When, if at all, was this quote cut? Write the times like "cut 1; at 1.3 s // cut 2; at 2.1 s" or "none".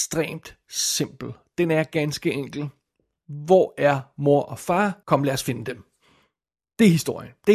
cut 1; at 5.0 s

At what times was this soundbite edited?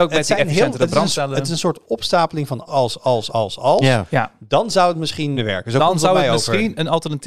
cut 1; at 1.1 s // cut 2; at 2.7 s // cut 3; at 3.3 s // cut 4; at 5.3 s

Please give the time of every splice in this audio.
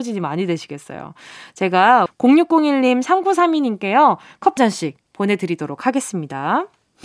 cut 1; at 2.1 s // cut 2; at 4.6 s

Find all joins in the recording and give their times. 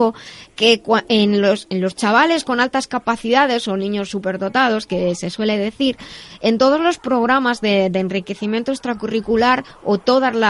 none

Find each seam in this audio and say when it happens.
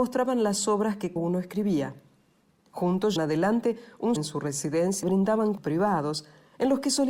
cut 1; at 1.2 s // cut 2; at 3.2 s // cut 3; at 4.2 s // cut 4; at 5.0 s // cut 5; at 5.6 s

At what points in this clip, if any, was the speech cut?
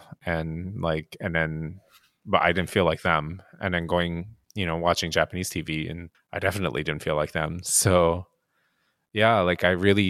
cut 1; at 4.4 s // cut 2; at 6.1 s

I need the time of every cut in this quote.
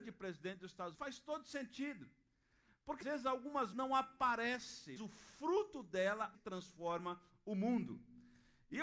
cut 1; at 0.9 s // cut 2; at 3.0 s // cut 3; at 3.7 s // cut 4; at 5.0 s // cut 5; at 6.3 s

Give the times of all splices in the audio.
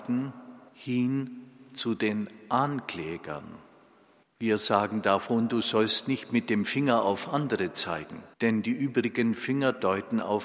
cut 1; at 8.3 s

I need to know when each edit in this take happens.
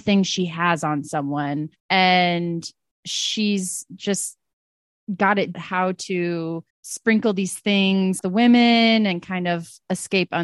cut 1; at 1.8 s // cut 2; at 5.5 s // cut 3; at 6.7 s // cut 4; at 8.2 s

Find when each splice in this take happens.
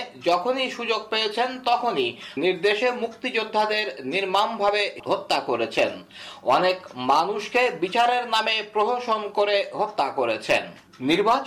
cut 1; at 2.4 s

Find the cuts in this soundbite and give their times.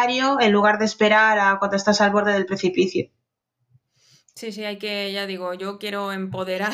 none

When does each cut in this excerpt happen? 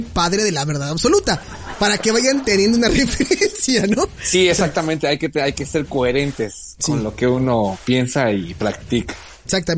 none

